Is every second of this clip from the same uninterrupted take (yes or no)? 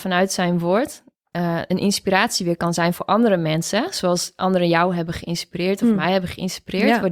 yes